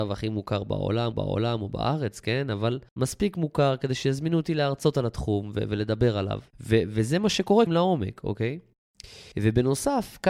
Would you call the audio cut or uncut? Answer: cut